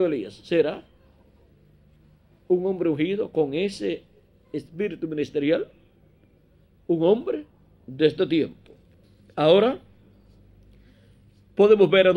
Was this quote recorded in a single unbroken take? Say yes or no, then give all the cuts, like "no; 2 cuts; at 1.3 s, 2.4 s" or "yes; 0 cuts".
yes; 0 cuts